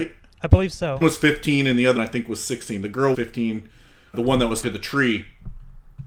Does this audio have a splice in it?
yes; 5 cuts; at 1.0 s, 2.0 s, 3.1 s, 4.1 s, 4.6 s

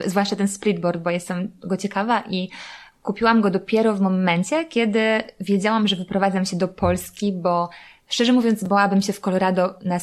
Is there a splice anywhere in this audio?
no; 0 cuts

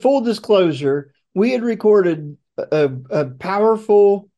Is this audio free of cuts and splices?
yes; 0 cuts

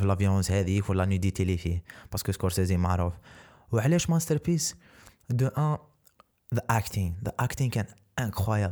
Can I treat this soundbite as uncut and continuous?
yes; 0 cuts

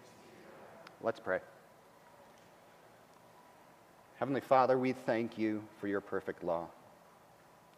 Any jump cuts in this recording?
no; 0 cuts

